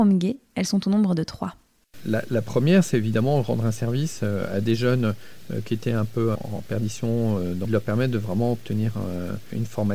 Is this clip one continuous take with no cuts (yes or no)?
no